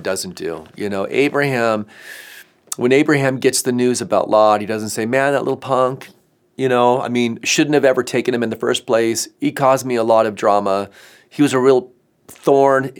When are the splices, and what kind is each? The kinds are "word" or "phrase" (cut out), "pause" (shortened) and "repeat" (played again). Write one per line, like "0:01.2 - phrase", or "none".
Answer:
none